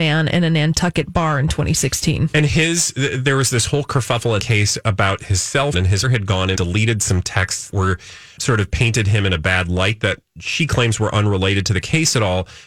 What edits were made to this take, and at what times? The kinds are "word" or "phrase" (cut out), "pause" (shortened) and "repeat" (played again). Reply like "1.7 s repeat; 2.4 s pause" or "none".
4.4 s word; 5.7 s word; 6.0 s word; 6.5 s word; 7.7 s word; 8.4 s word